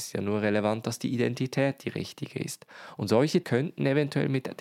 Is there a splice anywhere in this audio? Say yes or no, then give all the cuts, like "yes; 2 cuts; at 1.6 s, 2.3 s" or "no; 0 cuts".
yes; 1 cut; at 3.4 s